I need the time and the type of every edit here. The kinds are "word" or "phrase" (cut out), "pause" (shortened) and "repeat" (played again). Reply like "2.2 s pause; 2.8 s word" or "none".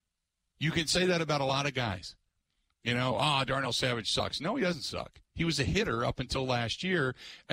none